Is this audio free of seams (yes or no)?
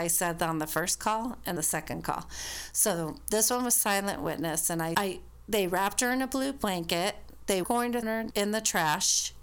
no